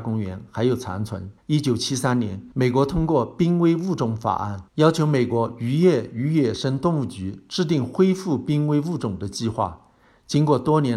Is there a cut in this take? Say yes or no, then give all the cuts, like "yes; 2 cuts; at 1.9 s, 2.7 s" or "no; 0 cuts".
yes; 3 cuts; at 1.4 s, 2.5 s, 4.7 s